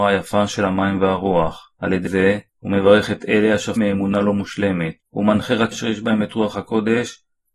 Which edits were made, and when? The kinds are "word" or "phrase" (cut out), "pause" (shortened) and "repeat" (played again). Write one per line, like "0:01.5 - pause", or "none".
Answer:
0:01.7 - pause
0:02.1 - word
0:02.5 - pause
0:03.8 - word
0:05.0 - pause
0:05.7 - phrase